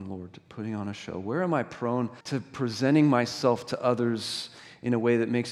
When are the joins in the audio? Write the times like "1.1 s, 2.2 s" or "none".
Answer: 2.2 s